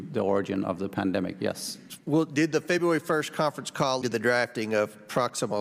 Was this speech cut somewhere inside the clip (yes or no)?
yes